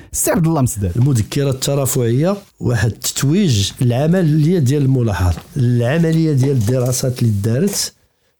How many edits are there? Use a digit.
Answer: 2